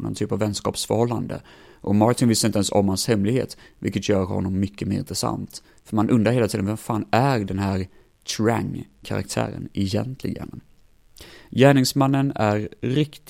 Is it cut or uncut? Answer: uncut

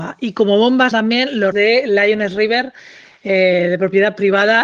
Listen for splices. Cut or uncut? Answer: cut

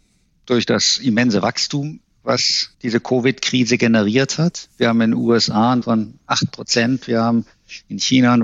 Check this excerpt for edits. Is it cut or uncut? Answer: cut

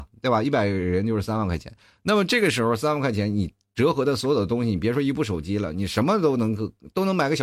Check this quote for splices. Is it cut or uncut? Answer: uncut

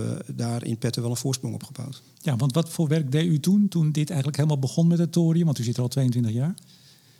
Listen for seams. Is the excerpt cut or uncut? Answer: uncut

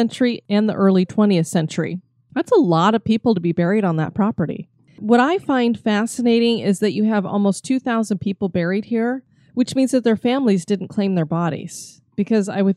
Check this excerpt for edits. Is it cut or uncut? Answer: uncut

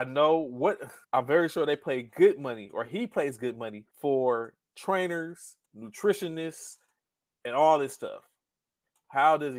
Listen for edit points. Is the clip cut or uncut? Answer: cut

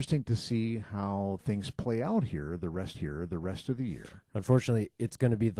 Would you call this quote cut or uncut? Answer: cut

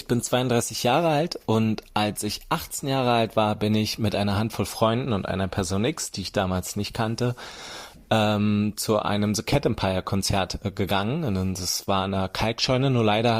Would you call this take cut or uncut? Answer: uncut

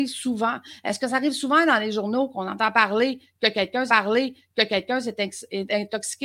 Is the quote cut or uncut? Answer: cut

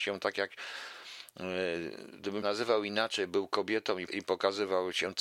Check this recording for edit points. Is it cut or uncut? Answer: cut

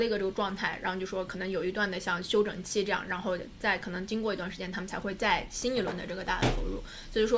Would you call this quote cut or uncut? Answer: uncut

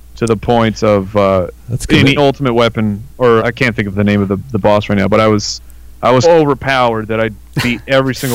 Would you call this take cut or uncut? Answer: cut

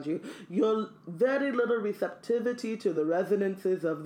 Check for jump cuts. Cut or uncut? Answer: uncut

